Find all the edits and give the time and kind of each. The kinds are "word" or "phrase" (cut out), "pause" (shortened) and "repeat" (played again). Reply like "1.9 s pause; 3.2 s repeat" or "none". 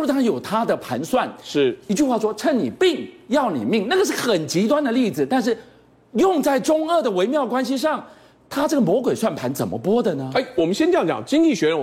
none